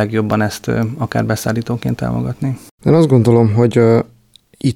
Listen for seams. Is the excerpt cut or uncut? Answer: uncut